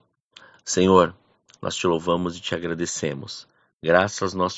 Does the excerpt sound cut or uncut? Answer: uncut